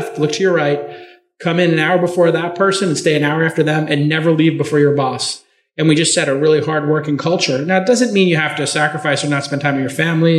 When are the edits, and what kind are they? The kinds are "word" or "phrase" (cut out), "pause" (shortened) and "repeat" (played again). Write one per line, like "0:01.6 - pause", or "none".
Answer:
none